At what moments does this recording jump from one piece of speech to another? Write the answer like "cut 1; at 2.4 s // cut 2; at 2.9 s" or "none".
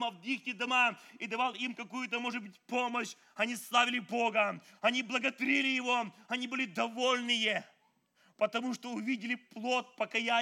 none